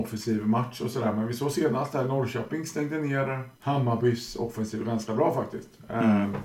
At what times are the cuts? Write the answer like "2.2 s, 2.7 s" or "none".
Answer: 3.5 s